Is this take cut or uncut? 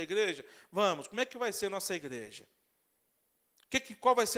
uncut